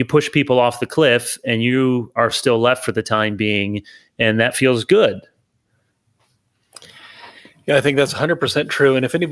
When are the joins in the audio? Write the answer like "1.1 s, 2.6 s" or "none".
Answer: none

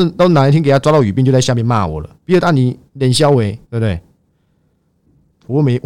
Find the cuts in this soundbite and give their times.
2.1 s, 2.9 s, 3.6 s

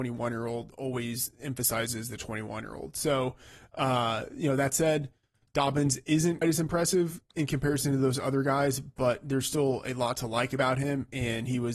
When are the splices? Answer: 6.4 s

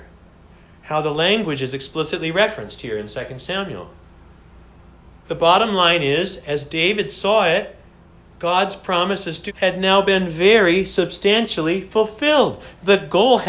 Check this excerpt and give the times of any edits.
9.5 s

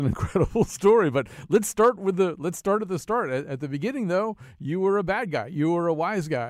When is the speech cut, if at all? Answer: none

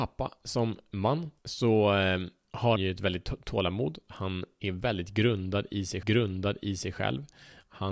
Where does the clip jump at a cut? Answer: 1.4 s, 2.8 s, 6.0 s

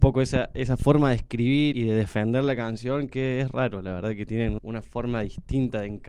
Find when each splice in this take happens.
1.7 s, 4.6 s

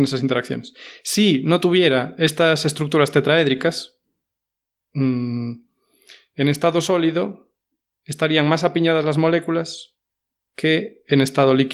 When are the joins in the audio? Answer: none

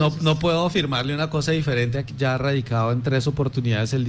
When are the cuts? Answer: 2.1 s

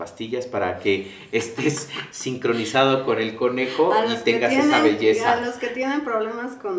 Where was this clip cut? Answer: none

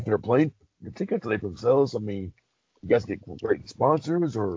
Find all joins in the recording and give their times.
0.9 s, 1.4 s

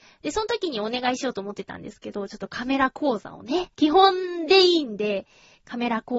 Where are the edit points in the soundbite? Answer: 3.7 s

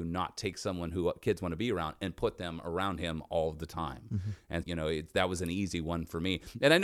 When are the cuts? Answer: 4.6 s

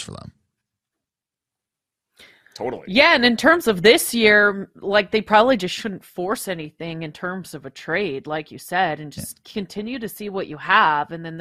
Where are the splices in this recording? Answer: none

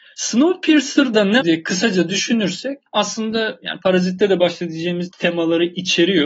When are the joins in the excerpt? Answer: 1.4 s, 2.9 s, 5.1 s

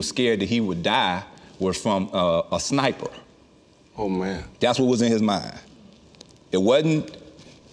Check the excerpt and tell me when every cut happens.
none

